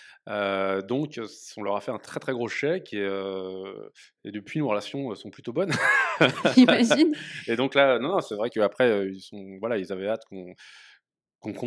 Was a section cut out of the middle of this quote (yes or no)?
no